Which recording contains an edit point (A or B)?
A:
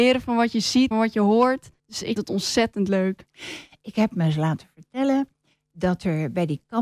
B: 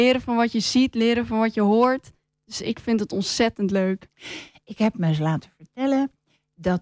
A